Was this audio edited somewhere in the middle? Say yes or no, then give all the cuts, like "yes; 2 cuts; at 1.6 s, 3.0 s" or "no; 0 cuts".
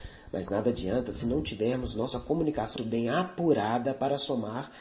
yes; 1 cut; at 2.8 s